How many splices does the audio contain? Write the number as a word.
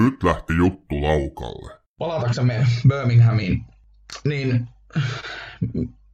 one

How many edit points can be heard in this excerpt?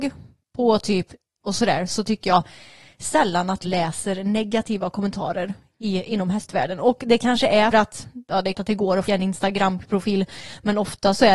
five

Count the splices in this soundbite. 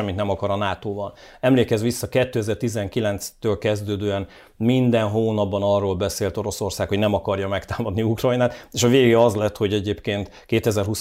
zero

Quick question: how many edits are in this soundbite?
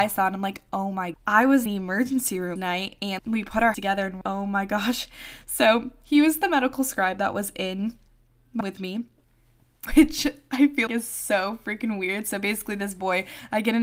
nine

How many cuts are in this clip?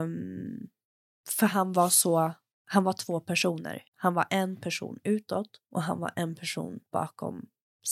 four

